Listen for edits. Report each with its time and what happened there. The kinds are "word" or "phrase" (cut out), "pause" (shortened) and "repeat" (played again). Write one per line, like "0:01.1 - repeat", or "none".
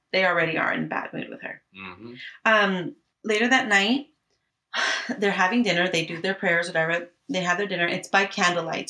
0:03.1 - pause